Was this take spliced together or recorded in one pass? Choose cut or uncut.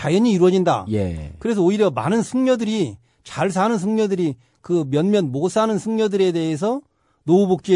uncut